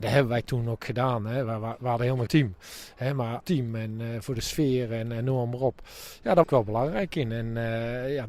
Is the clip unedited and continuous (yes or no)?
no